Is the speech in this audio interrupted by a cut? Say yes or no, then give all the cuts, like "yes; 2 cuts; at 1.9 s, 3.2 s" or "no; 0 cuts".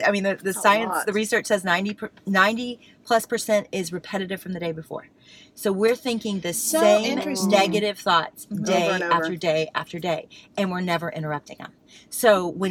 no; 0 cuts